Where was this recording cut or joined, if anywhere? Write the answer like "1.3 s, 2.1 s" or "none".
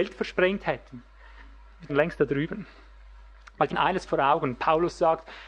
1.9 s, 3.7 s